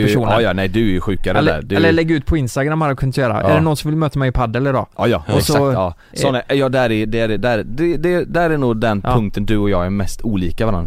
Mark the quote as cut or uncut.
uncut